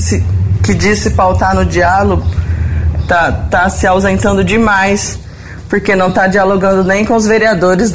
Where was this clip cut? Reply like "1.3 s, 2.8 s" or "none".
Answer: none